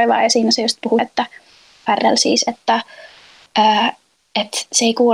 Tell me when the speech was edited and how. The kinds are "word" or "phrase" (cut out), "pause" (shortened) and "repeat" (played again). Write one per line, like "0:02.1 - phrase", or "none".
0:01.0 - word

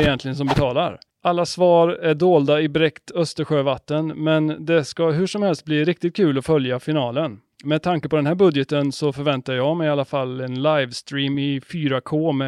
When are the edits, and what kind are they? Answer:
none

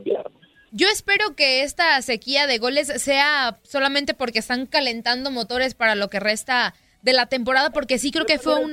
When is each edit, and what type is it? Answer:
none

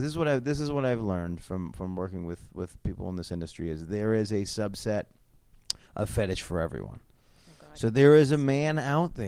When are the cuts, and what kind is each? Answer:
none

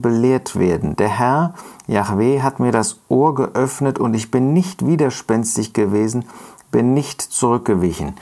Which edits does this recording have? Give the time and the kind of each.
none

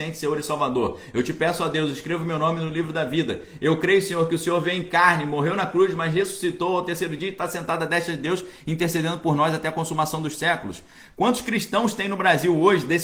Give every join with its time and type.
none

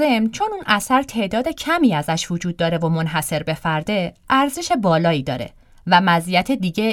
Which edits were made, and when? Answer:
none

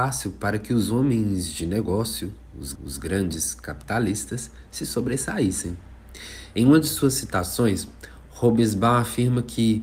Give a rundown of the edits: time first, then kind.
0:02.7 - repeat

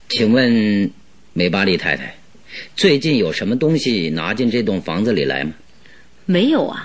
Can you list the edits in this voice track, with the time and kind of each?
none

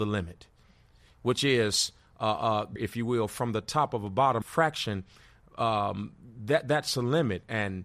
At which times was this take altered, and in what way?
0:02.8 - word
0:04.4 - phrase

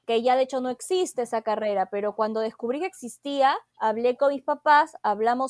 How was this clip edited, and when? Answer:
0:03.7 - pause

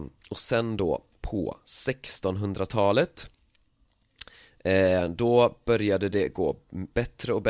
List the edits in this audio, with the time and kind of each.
none

